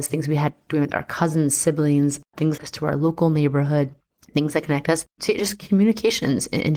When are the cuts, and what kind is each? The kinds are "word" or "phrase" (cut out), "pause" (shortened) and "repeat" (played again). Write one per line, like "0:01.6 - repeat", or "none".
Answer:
0:02.6 - phrase
0:04.0 - pause
0:05.1 - pause